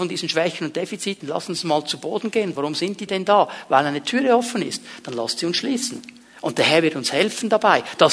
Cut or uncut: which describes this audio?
cut